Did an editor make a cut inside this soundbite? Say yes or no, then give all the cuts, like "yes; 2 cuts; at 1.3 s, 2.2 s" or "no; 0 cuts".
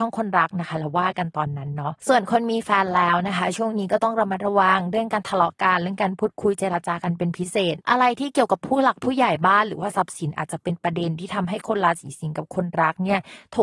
yes; 1 cut; at 2.0 s